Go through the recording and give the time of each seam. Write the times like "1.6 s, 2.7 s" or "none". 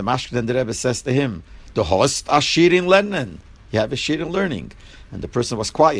none